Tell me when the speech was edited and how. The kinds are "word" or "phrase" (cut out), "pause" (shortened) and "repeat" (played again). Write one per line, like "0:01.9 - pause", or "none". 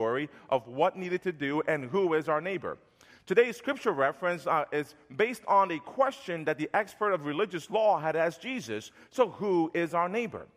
none